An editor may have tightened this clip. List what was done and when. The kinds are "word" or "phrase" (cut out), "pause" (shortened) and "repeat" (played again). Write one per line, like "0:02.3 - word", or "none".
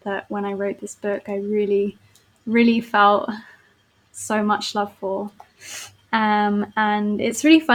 none